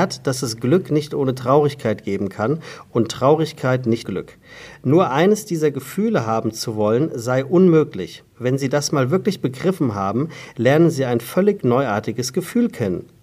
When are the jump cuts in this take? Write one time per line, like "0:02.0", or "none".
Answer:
0:04.0

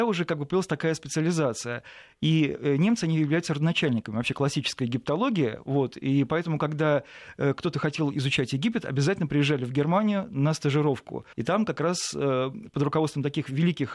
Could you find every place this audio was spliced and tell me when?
0:11.3

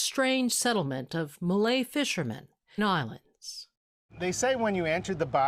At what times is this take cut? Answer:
0:02.8

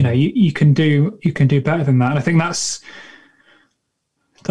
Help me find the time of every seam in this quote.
none

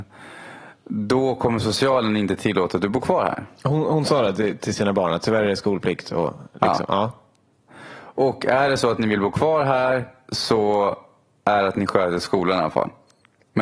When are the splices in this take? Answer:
none

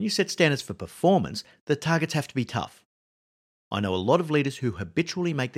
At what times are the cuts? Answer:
none

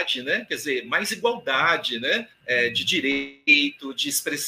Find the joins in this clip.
none

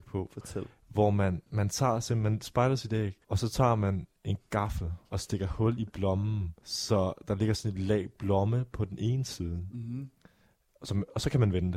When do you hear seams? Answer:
0:03.2
0:05.0
0:06.6

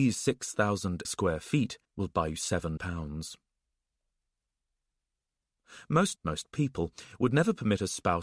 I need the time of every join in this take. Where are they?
0:01.0
0:01.8
0:02.8
0:06.2

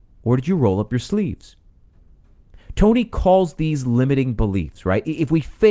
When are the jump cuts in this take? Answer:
none

